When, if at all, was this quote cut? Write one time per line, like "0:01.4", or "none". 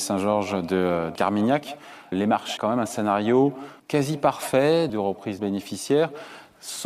0:01.2
0:02.1
0:02.6
0:03.8
0:04.9
0:05.4